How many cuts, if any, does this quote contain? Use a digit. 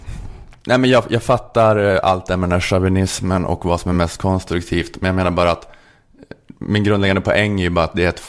0